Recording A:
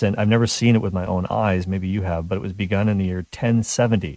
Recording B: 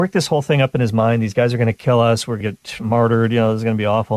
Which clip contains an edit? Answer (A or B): B